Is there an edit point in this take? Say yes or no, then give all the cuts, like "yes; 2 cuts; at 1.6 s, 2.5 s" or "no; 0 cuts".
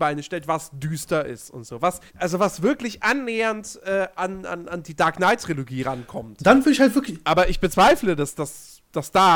yes; 1 cut; at 2.1 s